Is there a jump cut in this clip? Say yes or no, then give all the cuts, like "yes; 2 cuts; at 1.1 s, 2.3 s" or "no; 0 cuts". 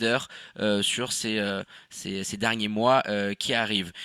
no; 0 cuts